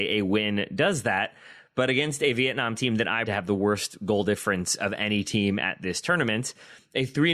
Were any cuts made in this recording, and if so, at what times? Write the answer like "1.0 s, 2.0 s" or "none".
3.3 s

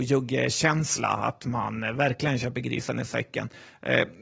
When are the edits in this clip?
none

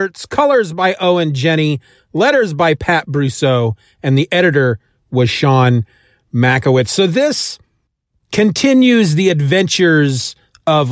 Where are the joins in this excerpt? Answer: none

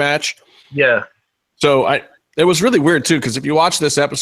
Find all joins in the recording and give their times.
none

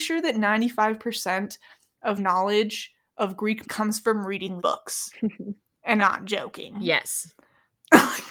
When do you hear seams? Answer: 2.2 s, 3.6 s, 4.6 s, 6.0 s

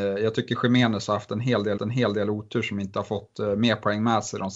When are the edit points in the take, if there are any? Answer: 1.8 s

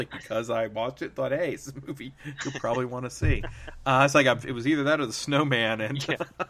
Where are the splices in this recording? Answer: none

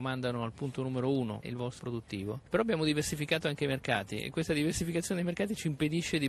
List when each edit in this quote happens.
1.4 s, 1.8 s

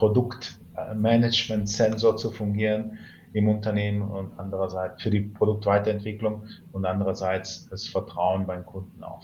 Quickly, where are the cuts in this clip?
none

